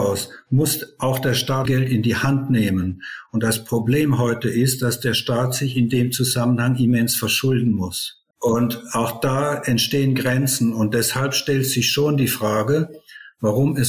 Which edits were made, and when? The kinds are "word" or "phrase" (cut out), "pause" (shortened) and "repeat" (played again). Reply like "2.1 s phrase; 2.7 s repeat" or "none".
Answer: 1.7 s word; 8.3 s pause